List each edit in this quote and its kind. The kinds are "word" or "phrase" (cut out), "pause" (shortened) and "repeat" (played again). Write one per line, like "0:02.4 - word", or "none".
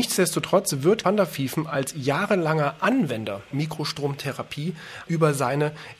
0:01.0 - word
0:03.5 - word
0:05.1 - word